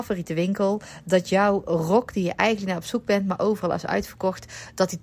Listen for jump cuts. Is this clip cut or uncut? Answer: uncut